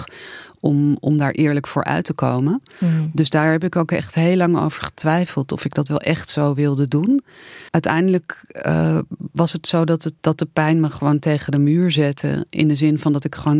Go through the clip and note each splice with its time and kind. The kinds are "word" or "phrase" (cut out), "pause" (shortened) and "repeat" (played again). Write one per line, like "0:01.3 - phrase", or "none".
0:07.7 - pause
0:10.2 - pause